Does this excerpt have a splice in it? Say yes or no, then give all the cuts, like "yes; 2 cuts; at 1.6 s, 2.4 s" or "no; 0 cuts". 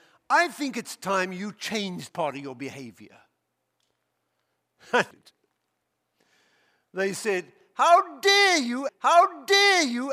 yes; 3 cuts; at 2.1 s, 5.1 s, 8.9 s